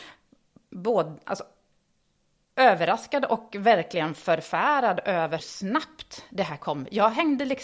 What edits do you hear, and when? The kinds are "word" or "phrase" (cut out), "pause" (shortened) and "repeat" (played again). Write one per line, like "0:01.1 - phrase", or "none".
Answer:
0:05.4 - word